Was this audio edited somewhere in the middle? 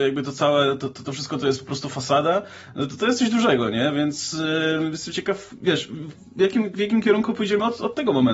no; 0 cuts

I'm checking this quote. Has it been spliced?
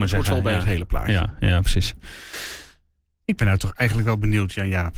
no; 0 cuts

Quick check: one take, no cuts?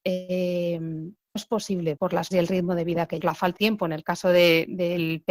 no; 5 cuts; at 1.4 s, 2.0 s, 2.3 s, 3.2 s, 3.6 s

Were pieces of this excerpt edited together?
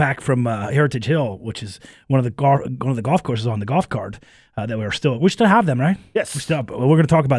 no; 0 cuts

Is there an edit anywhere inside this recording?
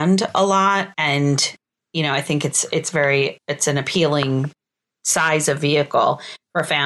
yes; 1 cut; at 0.9 s

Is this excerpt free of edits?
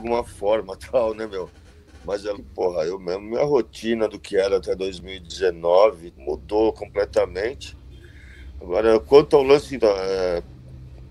no; 3 cuts; at 2.3 s, 6.1 s, 9.8 s

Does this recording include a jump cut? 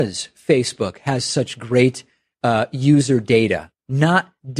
no; 0 cuts

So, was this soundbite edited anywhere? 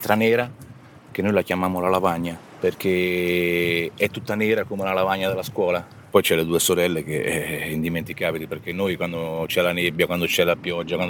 no; 0 cuts

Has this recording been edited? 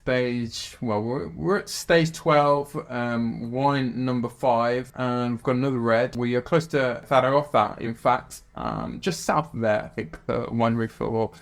yes; 1 cut; at 4.9 s

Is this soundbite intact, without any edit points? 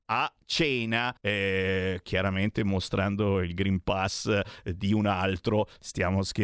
no; 1 cut; at 1.2 s

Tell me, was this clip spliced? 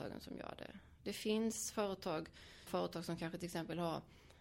yes; 1 cut; at 2.7 s

